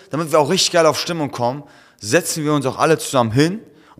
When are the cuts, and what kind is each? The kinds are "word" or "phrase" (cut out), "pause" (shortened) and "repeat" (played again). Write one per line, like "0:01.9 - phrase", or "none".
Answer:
none